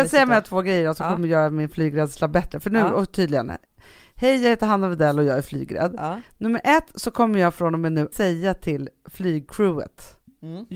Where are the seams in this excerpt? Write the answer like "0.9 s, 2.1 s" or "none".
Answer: 8.1 s